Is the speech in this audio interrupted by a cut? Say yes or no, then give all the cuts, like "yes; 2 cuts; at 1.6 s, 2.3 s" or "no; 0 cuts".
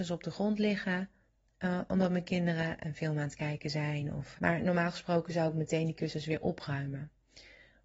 yes; 1 cut; at 4.3 s